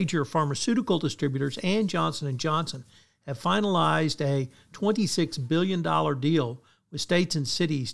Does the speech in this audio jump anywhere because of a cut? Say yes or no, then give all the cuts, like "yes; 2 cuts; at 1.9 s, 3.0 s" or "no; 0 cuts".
no; 0 cuts